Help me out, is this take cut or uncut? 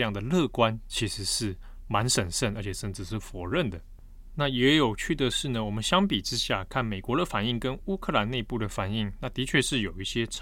uncut